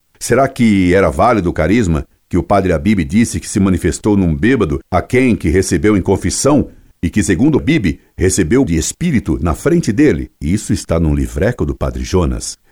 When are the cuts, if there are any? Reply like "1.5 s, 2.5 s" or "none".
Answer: 7.6 s, 8.7 s, 10.4 s

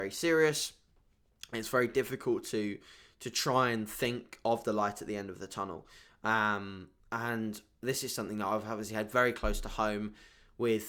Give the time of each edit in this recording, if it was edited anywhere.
7.0 s

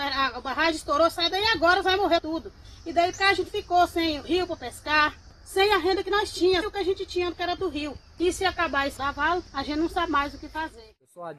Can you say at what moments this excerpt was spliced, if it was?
1.8 s, 2.2 s, 3.1 s, 6.6 s, 7.6 s, 9.0 s

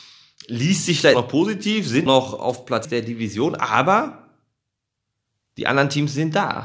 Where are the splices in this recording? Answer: 1.1 s, 2.1 s, 2.8 s

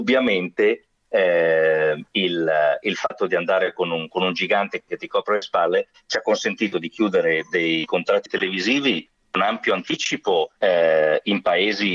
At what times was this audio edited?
10.6 s

